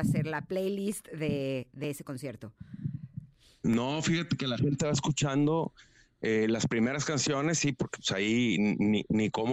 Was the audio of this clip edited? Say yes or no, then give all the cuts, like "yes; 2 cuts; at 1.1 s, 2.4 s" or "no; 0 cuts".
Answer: no; 0 cuts